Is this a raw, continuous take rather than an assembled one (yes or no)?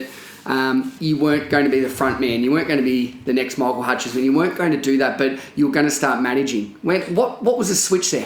no